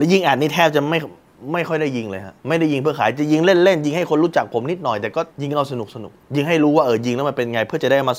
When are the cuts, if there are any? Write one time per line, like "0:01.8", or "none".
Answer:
0:02.4
0:05.3
0:06.2